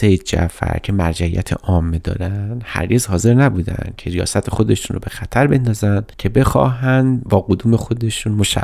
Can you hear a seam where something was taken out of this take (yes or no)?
no